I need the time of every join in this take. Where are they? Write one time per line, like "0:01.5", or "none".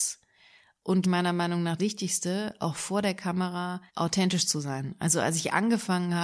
0:01.0
0:01.8
0:03.9